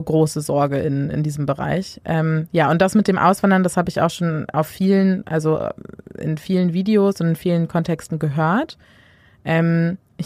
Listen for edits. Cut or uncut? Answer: uncut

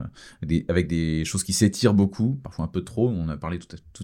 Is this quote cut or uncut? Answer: uncut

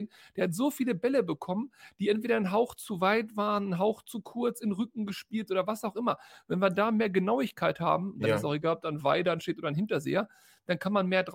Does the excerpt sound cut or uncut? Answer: uncut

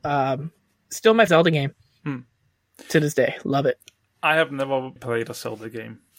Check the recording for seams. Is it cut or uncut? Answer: cut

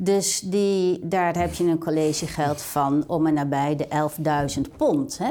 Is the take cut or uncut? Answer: uncut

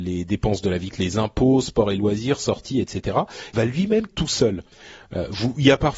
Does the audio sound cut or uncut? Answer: cut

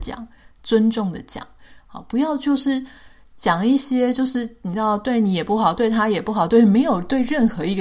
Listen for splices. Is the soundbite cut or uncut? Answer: uncut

